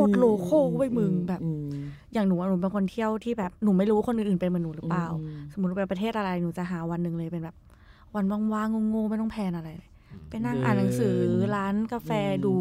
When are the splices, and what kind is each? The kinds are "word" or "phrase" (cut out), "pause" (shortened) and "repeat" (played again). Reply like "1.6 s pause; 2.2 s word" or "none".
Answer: 3.6 s pause